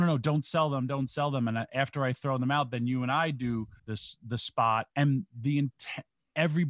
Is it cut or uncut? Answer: cut